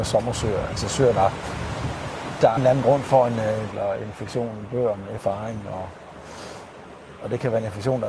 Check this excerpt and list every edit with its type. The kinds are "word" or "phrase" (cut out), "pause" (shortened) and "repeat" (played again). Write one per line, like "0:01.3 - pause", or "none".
0:02.6 - word
0:03.7 - word
0:05.2 - word

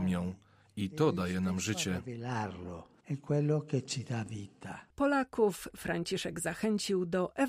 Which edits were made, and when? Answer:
none

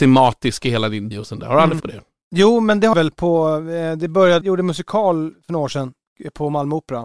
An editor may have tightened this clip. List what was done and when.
0:01.1 - word
0:01.8 - word
0:02.9 - word
0:04.4 - word

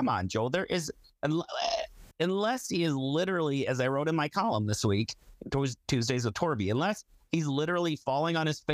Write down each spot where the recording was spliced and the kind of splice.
0:02.1 - pause

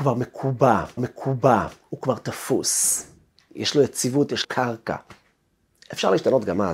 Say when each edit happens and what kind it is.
0:01.0 - repeat
0:04.4 - word

